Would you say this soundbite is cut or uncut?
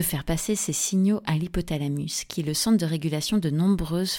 uncut